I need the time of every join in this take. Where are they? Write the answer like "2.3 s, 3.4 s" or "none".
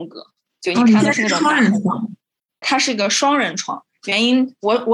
2.6 s